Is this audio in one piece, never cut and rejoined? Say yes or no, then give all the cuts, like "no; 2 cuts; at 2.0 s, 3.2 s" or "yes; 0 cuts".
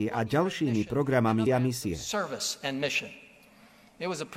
no; 1 cut; at 1.5 s